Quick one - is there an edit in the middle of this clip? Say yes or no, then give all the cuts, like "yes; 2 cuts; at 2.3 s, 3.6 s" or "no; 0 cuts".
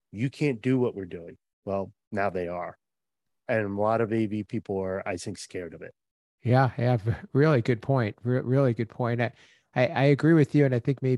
no; 0 cuts